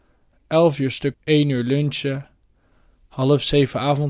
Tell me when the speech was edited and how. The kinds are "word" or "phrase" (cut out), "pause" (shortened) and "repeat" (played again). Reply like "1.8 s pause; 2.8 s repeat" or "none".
1.1 s word